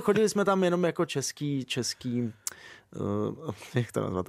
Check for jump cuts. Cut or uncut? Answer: uncut